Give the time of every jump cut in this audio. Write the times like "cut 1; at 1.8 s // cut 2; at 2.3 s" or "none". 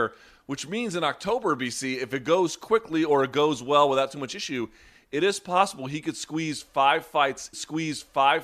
cut 1; at 7.5 s